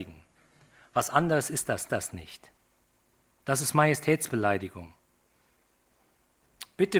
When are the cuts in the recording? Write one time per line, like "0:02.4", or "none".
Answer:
0:01.9